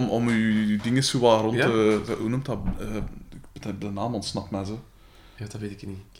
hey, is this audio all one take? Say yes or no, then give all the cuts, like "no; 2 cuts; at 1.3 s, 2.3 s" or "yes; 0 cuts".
yes; 0 cuts